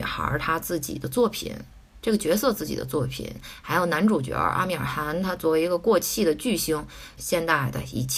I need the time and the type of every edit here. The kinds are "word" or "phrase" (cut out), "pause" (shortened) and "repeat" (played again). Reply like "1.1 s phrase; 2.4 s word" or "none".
7.2 s phrase